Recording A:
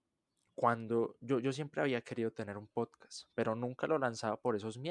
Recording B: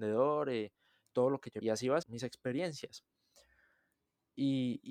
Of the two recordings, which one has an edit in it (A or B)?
B